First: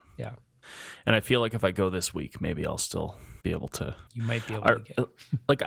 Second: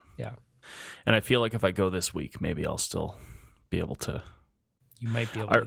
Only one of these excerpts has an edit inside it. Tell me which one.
first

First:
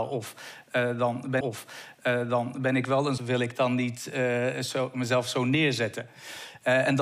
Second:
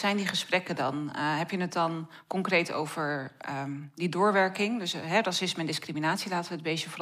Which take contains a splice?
first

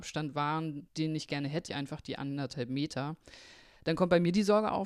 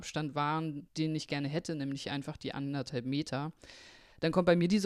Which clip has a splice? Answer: first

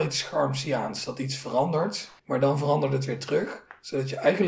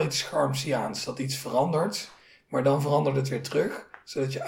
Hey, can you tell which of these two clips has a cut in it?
first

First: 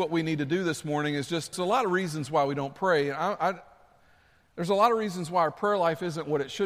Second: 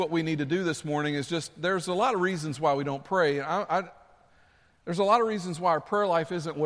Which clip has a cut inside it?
first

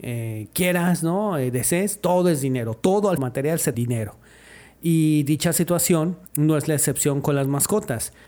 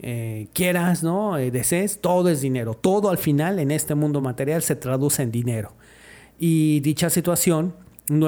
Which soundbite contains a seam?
first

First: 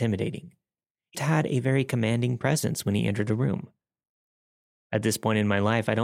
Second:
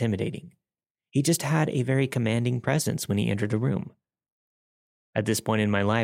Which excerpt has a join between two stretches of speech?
first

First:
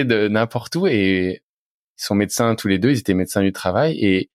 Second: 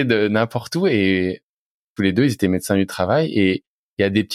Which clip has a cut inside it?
second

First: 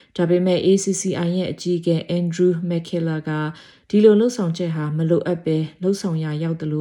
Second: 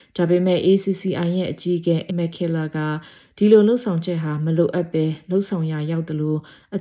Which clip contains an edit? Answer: second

